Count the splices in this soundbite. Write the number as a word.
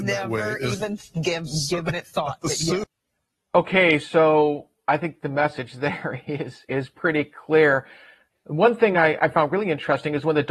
zero